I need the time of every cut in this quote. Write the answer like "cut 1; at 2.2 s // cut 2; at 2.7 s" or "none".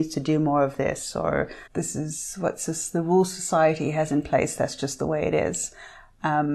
cut 1; at 1.7 s